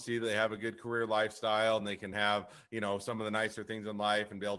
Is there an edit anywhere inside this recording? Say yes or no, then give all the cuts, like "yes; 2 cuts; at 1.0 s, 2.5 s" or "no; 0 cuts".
no; 0 cuts